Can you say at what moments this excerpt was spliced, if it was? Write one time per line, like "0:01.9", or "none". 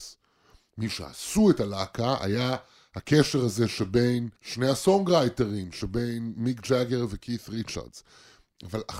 0:04.4